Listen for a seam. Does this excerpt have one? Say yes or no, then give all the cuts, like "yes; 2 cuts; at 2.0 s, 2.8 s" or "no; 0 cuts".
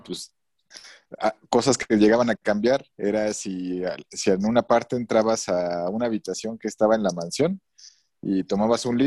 yes; 1 cut; at 2.9 s